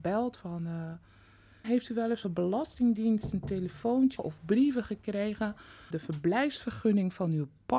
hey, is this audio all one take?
no; 4 cuts; at 1.6 s, 2.2 s, 4.2 s, 5.9 s

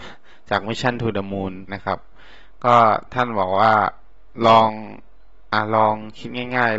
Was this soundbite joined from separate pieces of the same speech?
yes; 1 cut; at 1.7 s

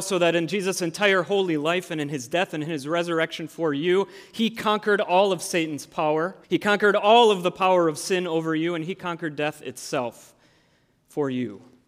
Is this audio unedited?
no; 1 cut; at 6.4 s

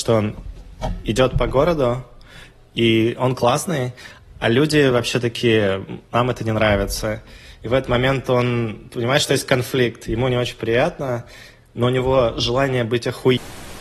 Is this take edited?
no; 0 cuts

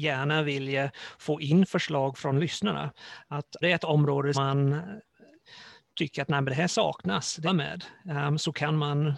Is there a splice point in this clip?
yes; 3 cuts; at 3.6 s, 4.3 s, 7.5 s

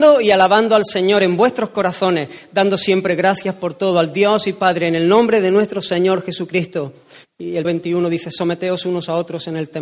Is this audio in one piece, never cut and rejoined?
no; 1 cut; at 7.6 s

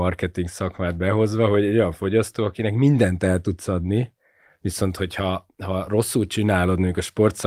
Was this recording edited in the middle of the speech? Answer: no; 0 cuts

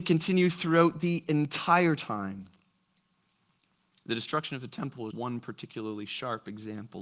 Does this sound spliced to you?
yes; 1 cut; at 5.1 s

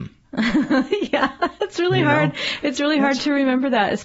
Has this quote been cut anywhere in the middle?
no; 0 cuts

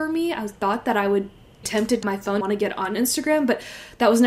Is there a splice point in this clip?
yes; 3 cuts; at 1.6 s, 2.0 s, 2.4 s

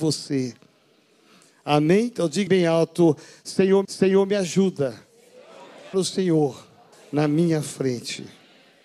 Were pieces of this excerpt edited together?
yes; 4 cuts; at 2.5 s, 3.8 s, 5.9 s, 6.9 s

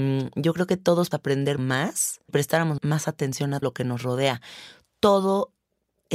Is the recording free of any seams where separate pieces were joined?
no; 5 cuts; at 1.1 s, 1.6 s, 2.3 s, 2.8 s, 3.6 s

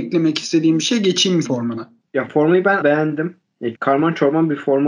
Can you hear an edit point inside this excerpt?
yes; 3 cuts; at 1.4 s, 2.8 s, 3.7 s

